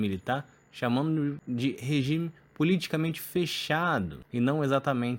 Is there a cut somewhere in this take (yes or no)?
no